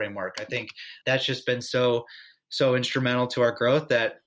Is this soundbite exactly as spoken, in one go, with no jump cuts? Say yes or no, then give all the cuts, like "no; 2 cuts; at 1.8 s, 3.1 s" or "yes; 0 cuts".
no; 1 cut; at 1.0 s